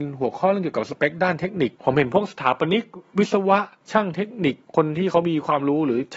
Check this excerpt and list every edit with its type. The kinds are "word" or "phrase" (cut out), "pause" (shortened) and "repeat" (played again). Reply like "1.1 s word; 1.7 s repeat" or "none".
1.8 s pause; 3.8 s pause

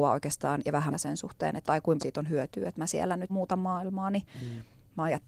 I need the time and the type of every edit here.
0.9 s phrase; 1.6 s word; 2.0 s word; 3.3 s word

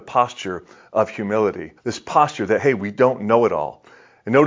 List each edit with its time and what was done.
1.8 s pause

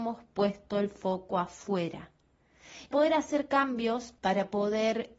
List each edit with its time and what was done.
2.9 s word; 4.2 s pause

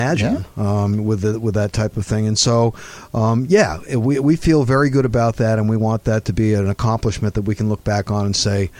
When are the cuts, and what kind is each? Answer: none

